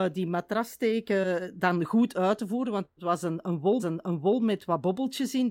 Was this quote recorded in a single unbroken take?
no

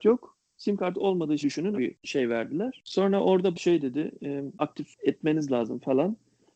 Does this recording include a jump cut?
yes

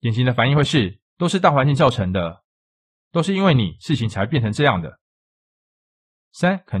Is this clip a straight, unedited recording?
no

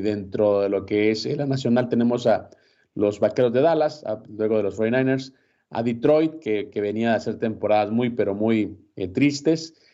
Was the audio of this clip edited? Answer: no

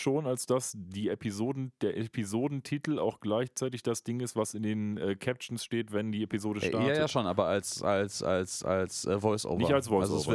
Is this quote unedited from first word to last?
yes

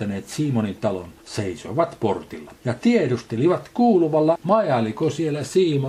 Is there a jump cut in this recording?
yes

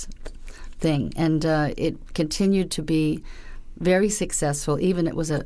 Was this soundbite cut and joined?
no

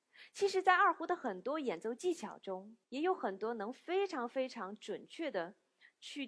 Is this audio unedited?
no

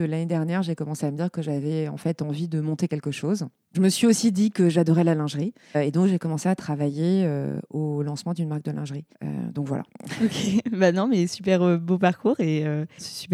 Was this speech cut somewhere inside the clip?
no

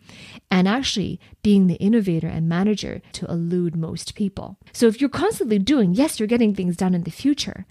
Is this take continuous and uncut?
no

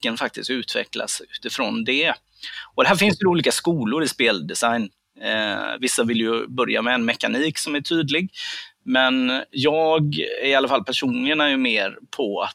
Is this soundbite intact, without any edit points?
yes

